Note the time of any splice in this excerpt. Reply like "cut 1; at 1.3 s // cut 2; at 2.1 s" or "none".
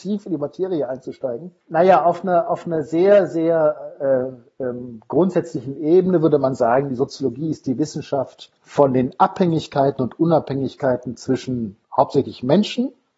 cut 1; at 1.6 s // cut 2; at 8.6 s // cut 3; at 11.8 s